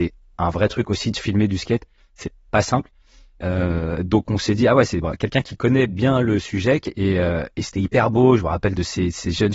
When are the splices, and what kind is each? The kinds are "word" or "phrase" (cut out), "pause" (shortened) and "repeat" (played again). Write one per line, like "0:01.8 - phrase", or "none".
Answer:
none